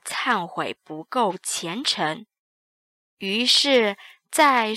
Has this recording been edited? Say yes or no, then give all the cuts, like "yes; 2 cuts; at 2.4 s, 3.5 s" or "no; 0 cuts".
no; 0 cuts